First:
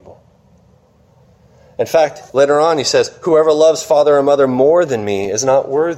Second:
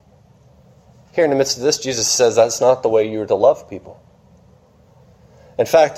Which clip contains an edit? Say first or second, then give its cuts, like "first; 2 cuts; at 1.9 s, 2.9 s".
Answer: first; 1 cut; at 2.3 s